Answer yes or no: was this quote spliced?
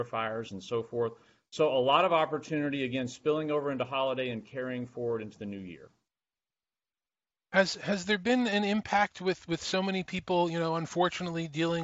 no